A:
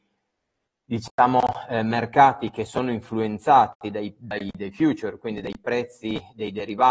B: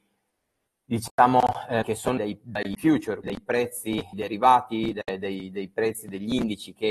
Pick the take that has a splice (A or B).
B